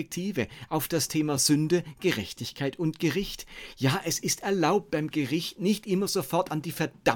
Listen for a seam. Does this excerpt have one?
no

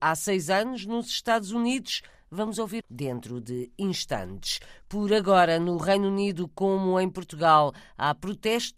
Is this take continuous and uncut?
no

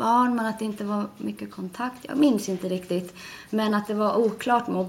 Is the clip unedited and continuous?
yes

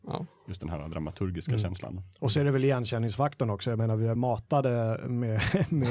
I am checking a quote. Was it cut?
yes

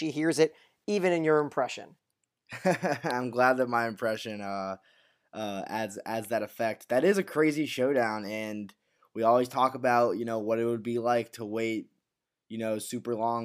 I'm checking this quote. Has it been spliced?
no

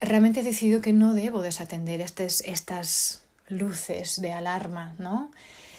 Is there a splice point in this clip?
no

